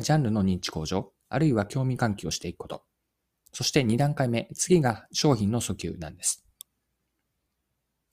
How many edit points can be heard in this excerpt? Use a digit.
0